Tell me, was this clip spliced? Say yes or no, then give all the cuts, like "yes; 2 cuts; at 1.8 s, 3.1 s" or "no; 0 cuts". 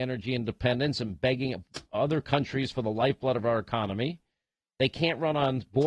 no; 0 cuts